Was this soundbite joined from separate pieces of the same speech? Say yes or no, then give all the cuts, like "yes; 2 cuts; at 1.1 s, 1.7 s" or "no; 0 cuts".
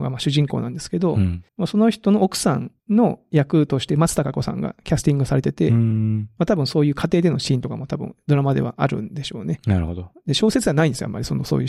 yes; 2 cuts; at 1.5 s, 2.8 s